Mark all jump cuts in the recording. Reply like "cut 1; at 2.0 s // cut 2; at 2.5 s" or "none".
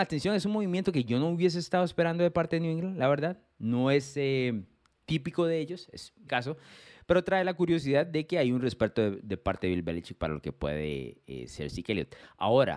cut 1; at 6.3 s